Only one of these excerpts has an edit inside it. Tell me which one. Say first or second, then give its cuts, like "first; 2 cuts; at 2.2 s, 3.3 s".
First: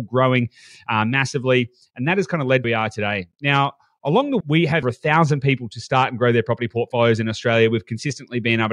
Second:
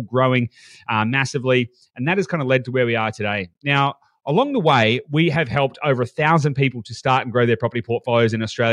first; 3 cuts; at 2.6 s, 4.4 s, 4.8 s